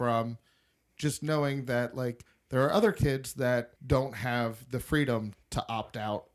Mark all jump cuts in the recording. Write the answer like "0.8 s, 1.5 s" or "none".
3.8 s, 5.4 s